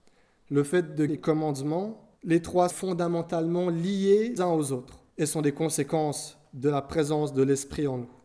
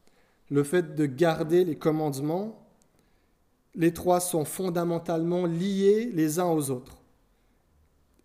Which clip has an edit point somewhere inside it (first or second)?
first